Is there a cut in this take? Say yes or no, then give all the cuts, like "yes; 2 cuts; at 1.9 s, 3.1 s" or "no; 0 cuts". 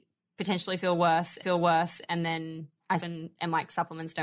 yes; 2 cuts; at 1.4 s, 3.0 s